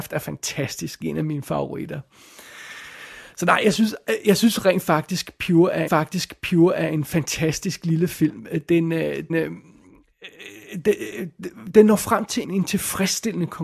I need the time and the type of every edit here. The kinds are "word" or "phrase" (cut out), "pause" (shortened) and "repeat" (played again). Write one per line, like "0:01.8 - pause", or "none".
0:01.0 - phrase
0:05.9 - repeat
0:09.3 - word
0:11.7 - word
0:12.4 - word